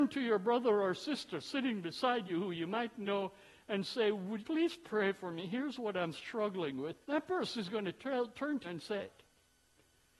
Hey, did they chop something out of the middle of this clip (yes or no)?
yes